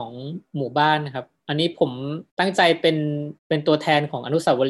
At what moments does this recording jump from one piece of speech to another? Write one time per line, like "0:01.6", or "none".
0:02.3
0:03.4